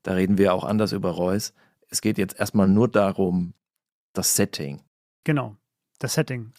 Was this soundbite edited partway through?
no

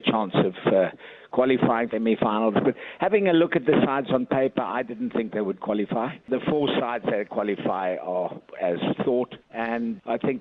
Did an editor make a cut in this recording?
yes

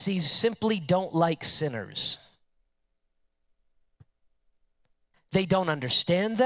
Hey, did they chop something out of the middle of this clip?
no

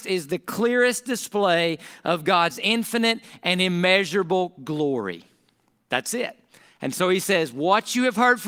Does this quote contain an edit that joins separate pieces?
no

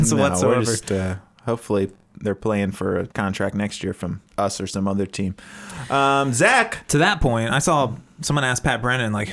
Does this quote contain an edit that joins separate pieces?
yes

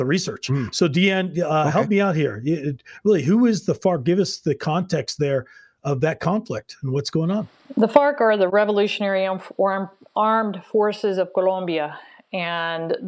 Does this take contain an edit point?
no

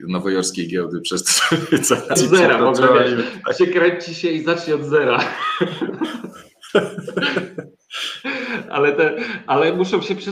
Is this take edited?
yes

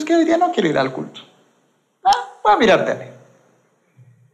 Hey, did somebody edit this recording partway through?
no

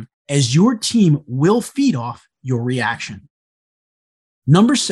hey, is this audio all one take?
yes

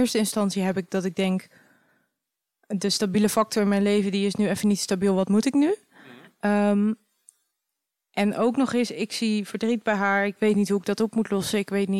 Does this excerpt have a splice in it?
no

